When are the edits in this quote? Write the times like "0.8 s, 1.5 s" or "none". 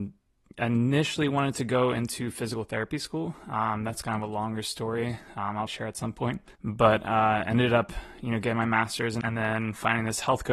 5.7 s, 6.5 s, 9.2 s